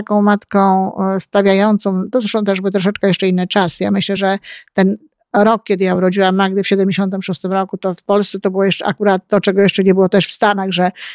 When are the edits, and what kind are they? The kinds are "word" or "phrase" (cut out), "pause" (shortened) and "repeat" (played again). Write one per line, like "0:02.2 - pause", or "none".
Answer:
none